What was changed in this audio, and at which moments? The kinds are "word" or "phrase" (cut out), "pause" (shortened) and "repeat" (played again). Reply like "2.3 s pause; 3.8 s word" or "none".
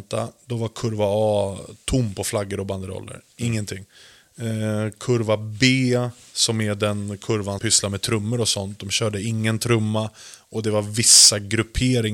7.6 s word